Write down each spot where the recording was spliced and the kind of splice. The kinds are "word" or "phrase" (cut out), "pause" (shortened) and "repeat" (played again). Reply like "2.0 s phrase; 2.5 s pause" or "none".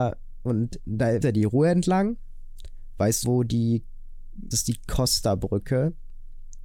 1.2 s word; 3.2 s word; 4.5 s phrase